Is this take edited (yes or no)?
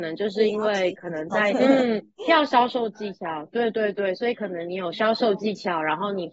yes